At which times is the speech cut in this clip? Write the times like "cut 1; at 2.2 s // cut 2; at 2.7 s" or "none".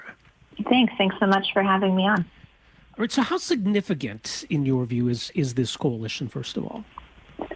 none

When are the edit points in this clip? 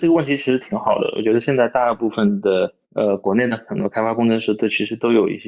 cut 1; at 2.8 s

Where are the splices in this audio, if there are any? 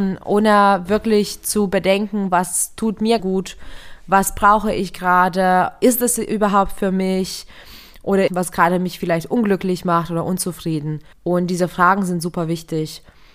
cut 1; at 3.2 s // cut 2; at 8.3 s // cut 3; at 11.1 s

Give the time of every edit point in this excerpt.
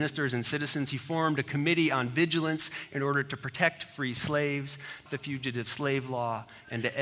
cut 1; at 5.1 s

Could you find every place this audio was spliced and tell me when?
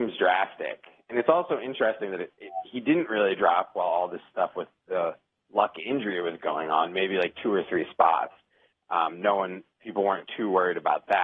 none

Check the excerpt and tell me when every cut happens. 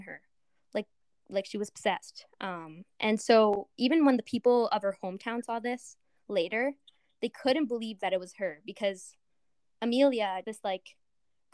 cut 1; at 10.4 s

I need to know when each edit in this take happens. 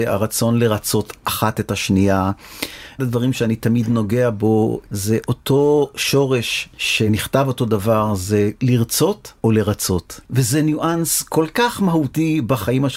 cut 1; at 3.0 s

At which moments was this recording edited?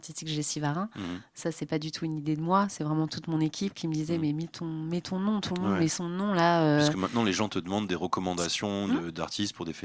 none

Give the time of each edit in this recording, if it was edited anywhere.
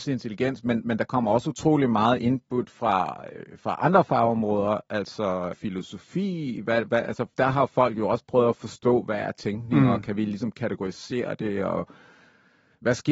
cut 1; at 5.5 s

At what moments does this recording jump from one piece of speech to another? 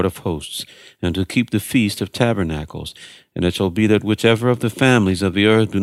none

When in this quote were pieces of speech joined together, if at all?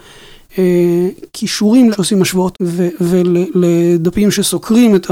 cut 1; at 1.9 s // cut 2; at 2.5 s

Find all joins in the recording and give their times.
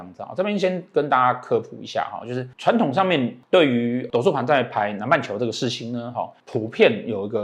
none

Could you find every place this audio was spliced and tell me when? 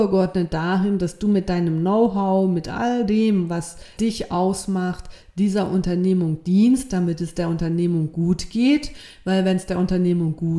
cut 1; at 4.0 s

